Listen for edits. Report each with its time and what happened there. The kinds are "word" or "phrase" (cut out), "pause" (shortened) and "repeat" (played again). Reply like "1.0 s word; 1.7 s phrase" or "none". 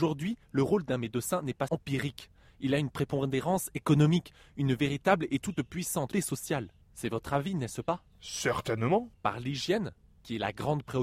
1.7 s word; 6.1 s word; 6.8 s pause; 9.1 s pause